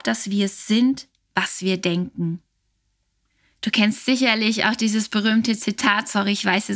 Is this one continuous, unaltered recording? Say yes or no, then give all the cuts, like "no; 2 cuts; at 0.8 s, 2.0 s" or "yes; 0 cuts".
yes; 0 cuts